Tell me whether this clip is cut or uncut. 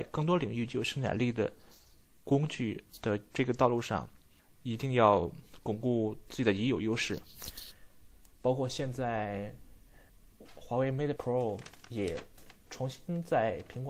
cut